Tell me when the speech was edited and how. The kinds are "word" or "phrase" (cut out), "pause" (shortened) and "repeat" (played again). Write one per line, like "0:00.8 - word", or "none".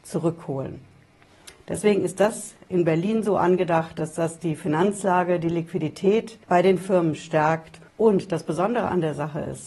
0:06.4 - pause
0:07.9 - pause